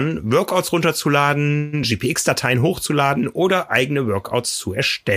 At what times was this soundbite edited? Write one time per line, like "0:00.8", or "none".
none